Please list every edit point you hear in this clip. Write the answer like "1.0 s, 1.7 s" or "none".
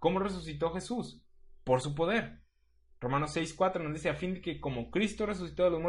none